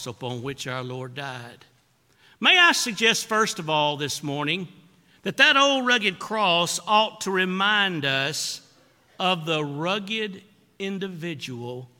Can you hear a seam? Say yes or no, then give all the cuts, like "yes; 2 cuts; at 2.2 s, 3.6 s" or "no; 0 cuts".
no; 0 cuts